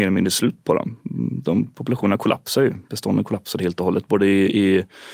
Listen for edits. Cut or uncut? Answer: uncut